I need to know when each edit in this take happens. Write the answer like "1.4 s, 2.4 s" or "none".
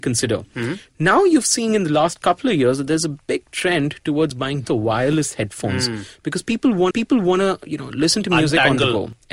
4.6 s, 6.9 s